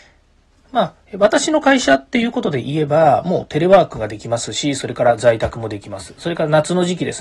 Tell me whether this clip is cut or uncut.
cut